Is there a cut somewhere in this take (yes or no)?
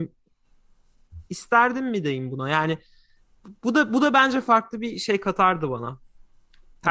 no